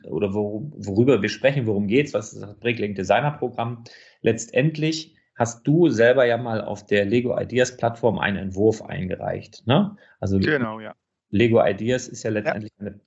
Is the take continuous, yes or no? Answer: yes